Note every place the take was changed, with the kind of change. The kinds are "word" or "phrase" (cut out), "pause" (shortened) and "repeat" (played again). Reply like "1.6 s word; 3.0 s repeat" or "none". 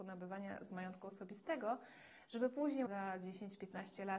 2.9 s word